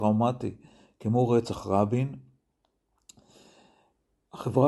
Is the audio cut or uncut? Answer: uncut